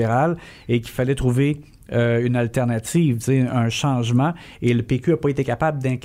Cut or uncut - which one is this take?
uncut